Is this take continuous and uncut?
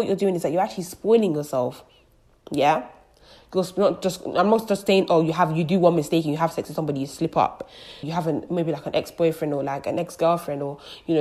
yes; 0 cuts

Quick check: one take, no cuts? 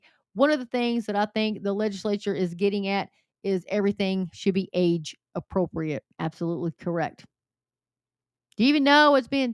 no; 1 cut; at 6.1 s

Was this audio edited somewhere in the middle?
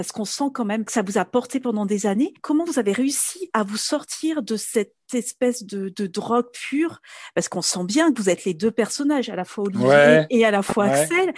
no; 0 cuts

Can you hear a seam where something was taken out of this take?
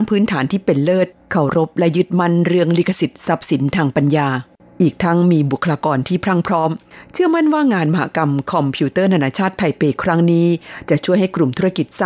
no; 0 cuts

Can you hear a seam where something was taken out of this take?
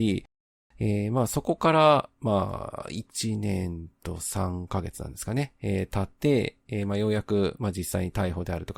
yes; 1 cut; at 6.2 s

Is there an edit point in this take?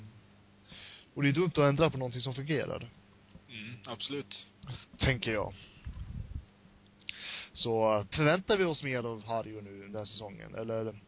yes; 3 cuts; at 3.4 s, 4.9 s, 8.1 s

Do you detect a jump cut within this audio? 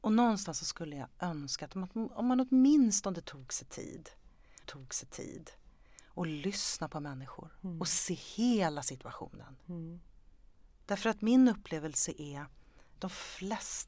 yes; 2 cuts; at 4.6 s, 13.0 s

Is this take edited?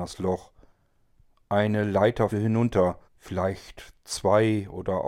yes; 2 cuts; at 2.3 s, 3.0 s

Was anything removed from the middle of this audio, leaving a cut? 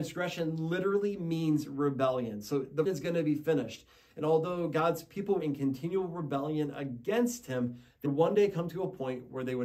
yes; 3 cuts; at 2.8 s, 5.4 s, 8.0 s

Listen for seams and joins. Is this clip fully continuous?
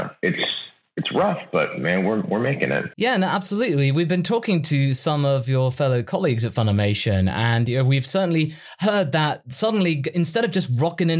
no; 1 cut; at 2.9 s

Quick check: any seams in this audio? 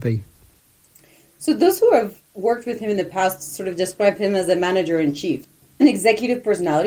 no; 0 cuts

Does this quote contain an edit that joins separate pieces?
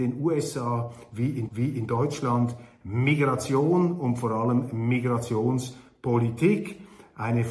yes; 1 cut; at 1.5 s

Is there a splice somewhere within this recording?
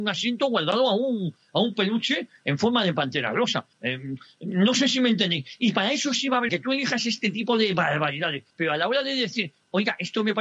yes; 3 cuts; at 3.7 s, 6.5 s, 8.5 s

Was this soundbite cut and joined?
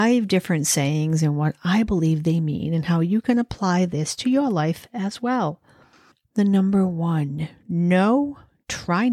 no; 0 cuts

